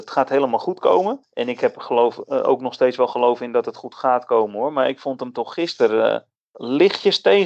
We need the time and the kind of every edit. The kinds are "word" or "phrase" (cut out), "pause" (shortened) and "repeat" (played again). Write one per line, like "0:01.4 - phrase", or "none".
none